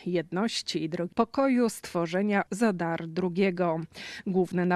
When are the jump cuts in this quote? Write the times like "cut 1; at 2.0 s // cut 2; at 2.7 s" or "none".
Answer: cut 1; at 1.1 s // cut 2; at 2.5 s